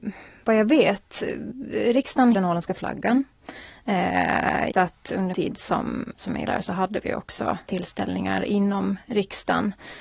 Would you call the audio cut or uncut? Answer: cut